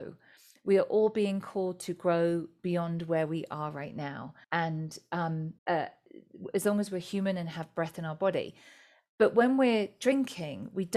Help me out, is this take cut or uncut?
cut